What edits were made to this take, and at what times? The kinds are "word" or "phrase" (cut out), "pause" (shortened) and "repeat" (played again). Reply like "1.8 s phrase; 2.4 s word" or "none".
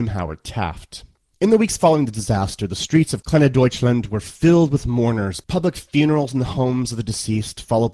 none